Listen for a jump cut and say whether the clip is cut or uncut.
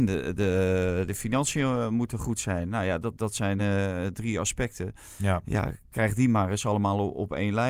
uncut